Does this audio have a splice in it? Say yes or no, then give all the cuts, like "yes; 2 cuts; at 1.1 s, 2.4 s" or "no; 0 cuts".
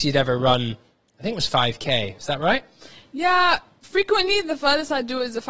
no; 0 cuts